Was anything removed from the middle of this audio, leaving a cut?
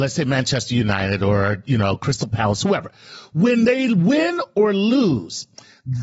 no; 0 cuts

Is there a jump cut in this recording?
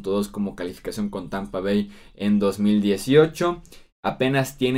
no; 0 cuts

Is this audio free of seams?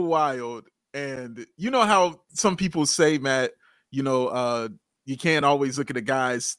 yes; 0 cuts

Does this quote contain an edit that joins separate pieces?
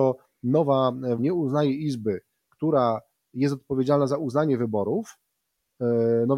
yes; 1 cut; at 1.2 s

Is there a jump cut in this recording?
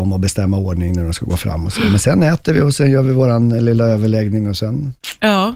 no; 0 cuts

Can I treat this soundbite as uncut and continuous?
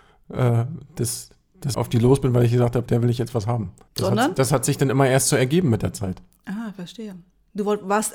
no; 2 cuts; at 1.7 s, 2.9 s

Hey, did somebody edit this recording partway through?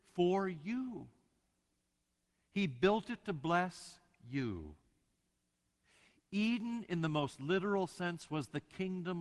no; 0 cuts

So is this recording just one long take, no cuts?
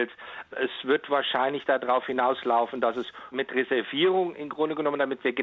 no; 1 cut; at 3.3 s

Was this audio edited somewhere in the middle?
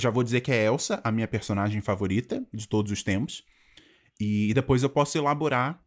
no; 0 cuts

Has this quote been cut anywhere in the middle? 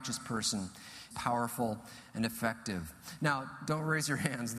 yes; 1 cut; at 1.1 s

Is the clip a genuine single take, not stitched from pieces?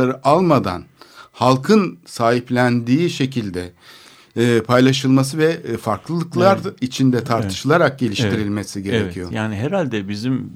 yes; 0 cuts

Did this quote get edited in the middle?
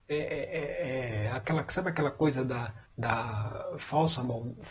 yes; 1 cut; at 2.9 s

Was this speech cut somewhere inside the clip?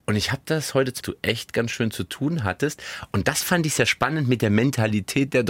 yes; 1 cut; at 1.0 s

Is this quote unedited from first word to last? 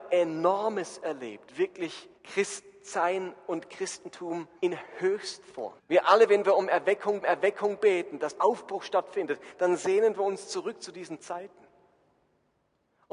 no; 5 cuts; at 2.2 s, 4.6 s, 5.8 s, 7.2 s, 8.4 s

